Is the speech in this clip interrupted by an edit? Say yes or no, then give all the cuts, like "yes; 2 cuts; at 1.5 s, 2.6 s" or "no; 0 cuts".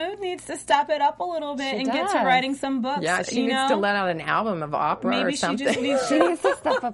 no; 0 cuts